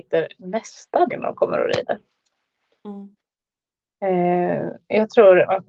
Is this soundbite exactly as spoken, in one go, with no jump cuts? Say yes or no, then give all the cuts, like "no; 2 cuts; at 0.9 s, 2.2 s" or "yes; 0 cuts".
no; 1 cut; at 1.1 s